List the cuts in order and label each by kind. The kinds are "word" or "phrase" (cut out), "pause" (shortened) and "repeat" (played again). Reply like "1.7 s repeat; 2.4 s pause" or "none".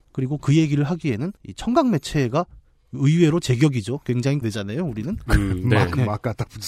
1.4 s pause; 4.4 s word